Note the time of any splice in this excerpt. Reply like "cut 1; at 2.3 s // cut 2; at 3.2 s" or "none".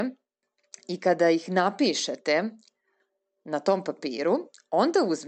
none